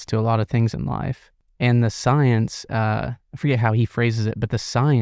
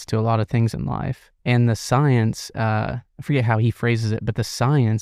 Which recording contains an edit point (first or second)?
second